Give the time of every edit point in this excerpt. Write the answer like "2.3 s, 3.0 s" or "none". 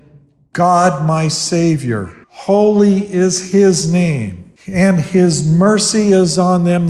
2.2 s, 4.6 s

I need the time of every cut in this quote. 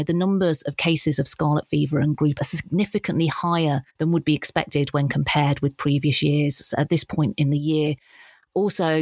2.4 s, 3.9 s

